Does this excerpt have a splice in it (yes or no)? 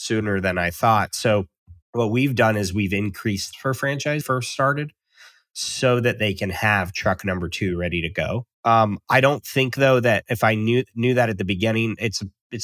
yes